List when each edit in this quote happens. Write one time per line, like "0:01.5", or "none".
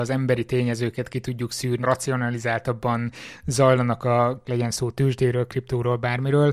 0:01.8
0:04.4